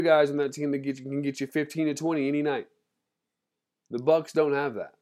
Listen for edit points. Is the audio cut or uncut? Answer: uncut